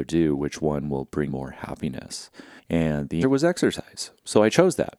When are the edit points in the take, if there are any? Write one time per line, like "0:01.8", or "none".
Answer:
0:01.3
0:02.6
0:03.2

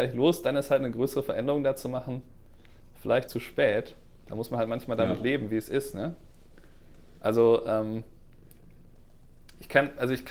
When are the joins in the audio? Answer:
0:03.3

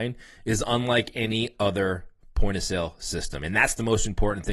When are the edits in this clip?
none

